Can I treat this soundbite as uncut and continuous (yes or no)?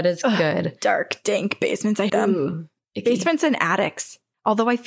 no